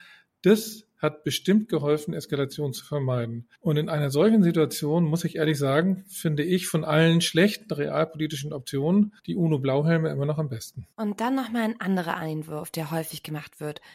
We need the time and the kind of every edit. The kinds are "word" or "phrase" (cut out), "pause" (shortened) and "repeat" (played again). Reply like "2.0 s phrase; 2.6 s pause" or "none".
3.6 s pause; 9.2 s pause; 10.9 s pause